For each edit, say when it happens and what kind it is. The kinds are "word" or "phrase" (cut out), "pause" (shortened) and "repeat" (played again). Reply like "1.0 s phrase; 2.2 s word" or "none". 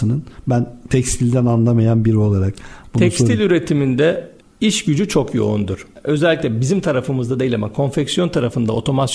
none